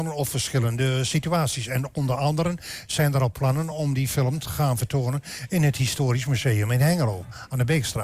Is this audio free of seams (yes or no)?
yes